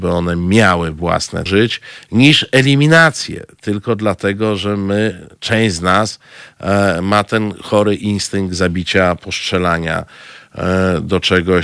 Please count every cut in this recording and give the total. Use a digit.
2